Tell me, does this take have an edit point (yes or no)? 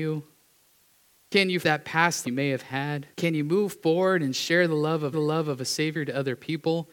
yes